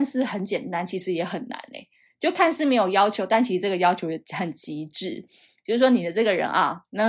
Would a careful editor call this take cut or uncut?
uncut